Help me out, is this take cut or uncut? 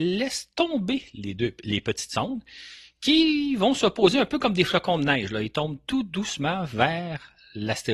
uncut